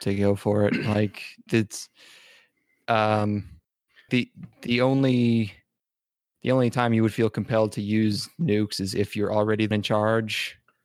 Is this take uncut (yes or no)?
no